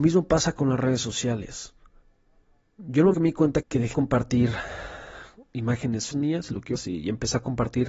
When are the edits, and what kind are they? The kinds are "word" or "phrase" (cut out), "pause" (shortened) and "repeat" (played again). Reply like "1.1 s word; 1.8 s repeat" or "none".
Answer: 3.1 s word; 3.6 s word; 3.9 s word; 6.1 s word; 6.7 s word